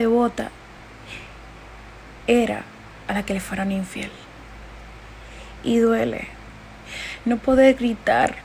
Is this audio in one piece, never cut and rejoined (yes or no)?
yes